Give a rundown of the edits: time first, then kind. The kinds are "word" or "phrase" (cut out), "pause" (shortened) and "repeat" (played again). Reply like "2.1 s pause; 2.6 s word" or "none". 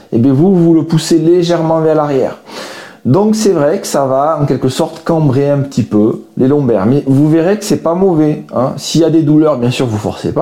none

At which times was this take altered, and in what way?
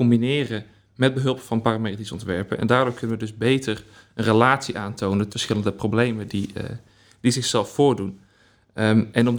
5.3 s word

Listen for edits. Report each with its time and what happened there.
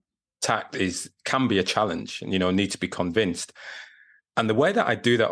none

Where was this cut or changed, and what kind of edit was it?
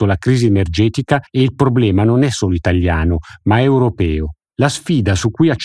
1.3 s pause

